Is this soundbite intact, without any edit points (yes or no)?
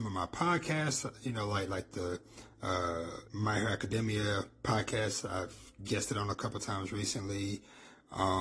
no